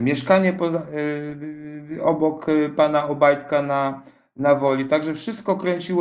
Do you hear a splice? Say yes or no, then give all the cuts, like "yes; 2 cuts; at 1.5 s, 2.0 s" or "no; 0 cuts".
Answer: no; 0 cuts